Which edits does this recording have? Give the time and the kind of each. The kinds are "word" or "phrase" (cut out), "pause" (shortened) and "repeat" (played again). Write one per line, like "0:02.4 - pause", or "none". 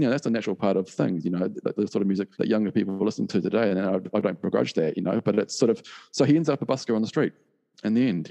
0:02.3 - pause

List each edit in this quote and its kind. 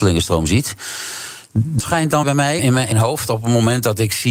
0:01.8 - word
0:02.2 - word
0:02.6 - word
0:02.9 - word

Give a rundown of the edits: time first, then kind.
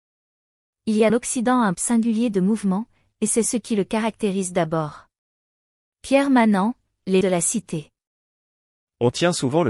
0:01.1 - word
0:01.7 - word
0:07.2 - word

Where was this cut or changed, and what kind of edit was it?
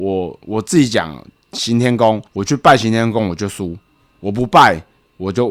0:02.3 - pause

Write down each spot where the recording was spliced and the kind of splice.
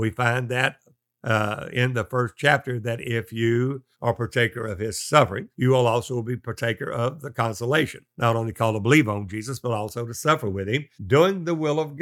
0:03.9 - pause
0:05.5 - pause
0:08.1 - pause
0:10.9 - pause

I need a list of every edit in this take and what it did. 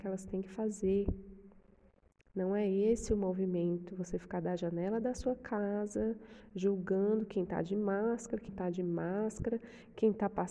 0:08.5 - word

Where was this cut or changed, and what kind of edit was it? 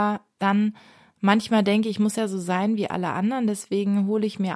none

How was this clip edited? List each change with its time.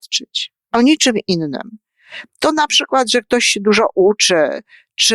none

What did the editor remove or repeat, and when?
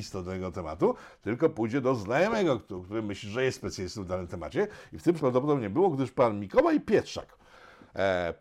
0:05.2 - phrase

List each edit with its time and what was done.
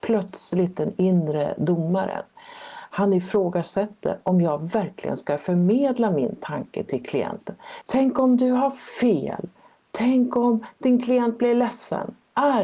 none

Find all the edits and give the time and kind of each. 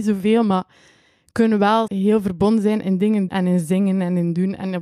0:01.9 - word
0:03.3 - word

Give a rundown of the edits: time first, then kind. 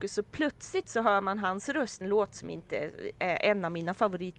0:02.0 - phrase

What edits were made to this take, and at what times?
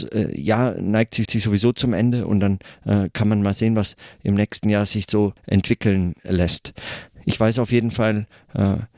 0:01.2 - repeat
0:05.4 - pause

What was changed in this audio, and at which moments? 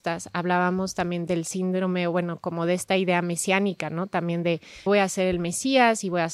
0:04.9 - word

